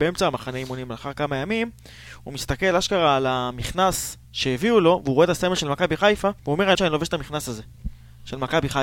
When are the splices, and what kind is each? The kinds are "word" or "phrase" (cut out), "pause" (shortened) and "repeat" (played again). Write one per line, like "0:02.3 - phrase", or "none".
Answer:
0:04.2 - pause
0:06.4 - pause
0:06.7 - phrase